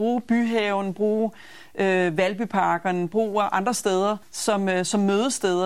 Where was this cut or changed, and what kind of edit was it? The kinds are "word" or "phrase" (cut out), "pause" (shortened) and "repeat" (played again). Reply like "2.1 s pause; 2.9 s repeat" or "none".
4.2 s pause